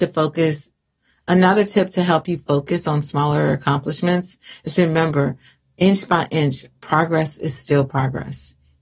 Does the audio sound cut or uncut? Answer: uncut